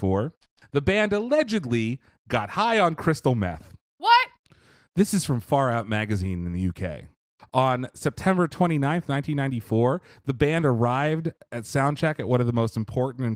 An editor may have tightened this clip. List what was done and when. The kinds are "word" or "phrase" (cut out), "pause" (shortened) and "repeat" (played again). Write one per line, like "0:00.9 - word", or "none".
none